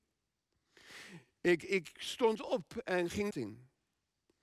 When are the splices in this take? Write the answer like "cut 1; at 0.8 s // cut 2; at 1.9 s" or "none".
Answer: cut 1; at 3.3 s